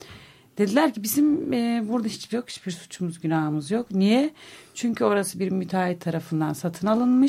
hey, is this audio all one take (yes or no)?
no